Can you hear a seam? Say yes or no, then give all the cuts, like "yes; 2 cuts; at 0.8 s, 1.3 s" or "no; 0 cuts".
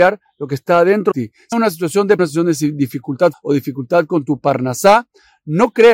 yes; 4 cuts; at 1.1 s, 1.5 s, 2.2 s, 3.3 s